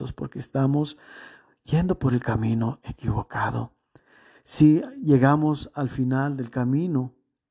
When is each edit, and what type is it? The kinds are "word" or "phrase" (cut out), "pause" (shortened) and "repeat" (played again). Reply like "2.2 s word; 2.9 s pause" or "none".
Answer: none